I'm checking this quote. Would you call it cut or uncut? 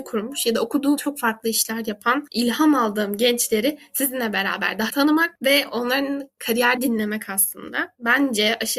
cut